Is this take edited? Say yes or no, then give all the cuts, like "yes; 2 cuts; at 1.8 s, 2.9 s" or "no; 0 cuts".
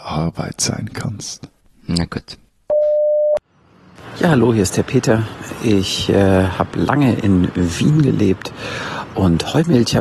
no; 0 cuts